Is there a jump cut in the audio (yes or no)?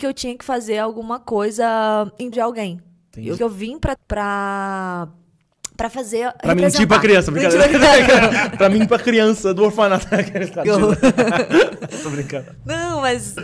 yes